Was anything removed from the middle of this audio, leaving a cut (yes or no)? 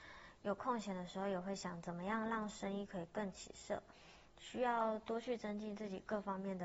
yes